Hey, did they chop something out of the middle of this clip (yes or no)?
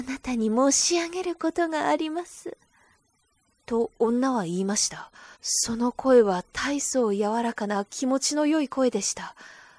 yes